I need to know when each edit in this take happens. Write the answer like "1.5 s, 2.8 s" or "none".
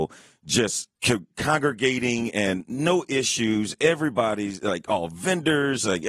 0.9 s